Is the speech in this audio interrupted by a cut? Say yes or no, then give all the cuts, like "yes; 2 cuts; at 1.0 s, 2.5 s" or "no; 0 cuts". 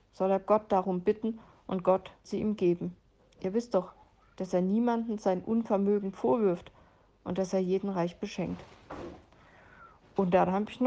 yes; 1 cut; at 2.2 s